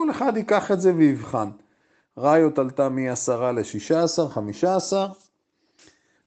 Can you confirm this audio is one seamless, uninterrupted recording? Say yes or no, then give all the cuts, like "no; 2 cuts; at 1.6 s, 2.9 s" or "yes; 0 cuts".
yes; 0 cuts